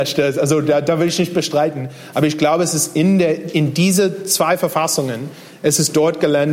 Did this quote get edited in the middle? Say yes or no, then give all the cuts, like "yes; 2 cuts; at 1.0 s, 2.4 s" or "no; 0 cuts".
no; 0 cuts